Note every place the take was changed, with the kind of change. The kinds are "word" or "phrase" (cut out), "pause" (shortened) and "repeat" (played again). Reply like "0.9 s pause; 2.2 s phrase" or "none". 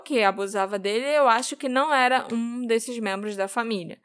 none